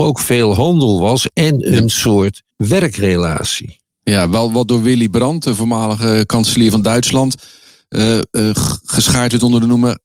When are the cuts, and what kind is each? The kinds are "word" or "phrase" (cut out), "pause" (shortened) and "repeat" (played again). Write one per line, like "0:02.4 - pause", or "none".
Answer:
0:02.5 - pause